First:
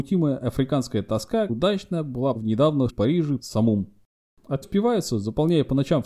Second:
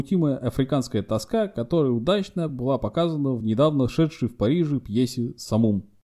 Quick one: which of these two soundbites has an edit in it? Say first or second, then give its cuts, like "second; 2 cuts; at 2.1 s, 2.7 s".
first; 5 cuts; at 1.5 s, 2.3 s, 2.9 s, 3.4 s, 4.6 s